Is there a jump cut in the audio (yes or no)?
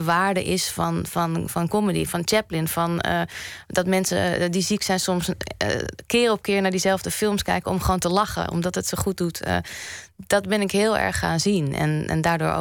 yes